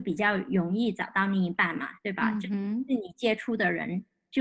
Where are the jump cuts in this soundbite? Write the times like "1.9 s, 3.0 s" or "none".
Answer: 2.0 s